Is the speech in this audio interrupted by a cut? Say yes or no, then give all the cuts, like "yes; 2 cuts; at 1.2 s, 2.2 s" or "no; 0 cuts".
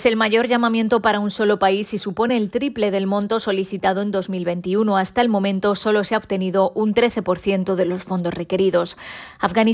no; 0 cuts